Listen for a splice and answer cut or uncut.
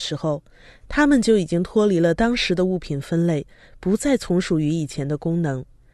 uncut